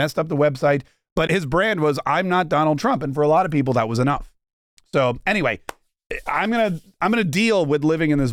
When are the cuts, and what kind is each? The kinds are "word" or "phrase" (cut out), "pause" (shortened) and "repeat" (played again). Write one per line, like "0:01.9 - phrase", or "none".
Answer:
0:01.3 - word